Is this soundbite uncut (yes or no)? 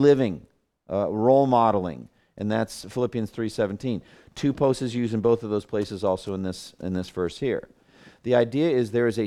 yes